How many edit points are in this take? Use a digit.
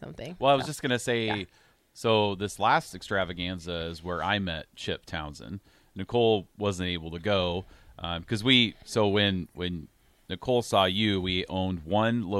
0